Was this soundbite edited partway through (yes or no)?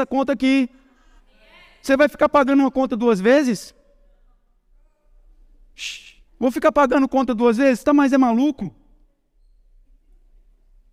yes